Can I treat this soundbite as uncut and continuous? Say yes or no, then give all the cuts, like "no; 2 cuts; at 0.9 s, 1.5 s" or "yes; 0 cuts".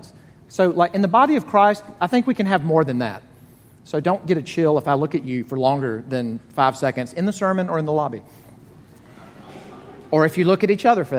yes; 0 cuts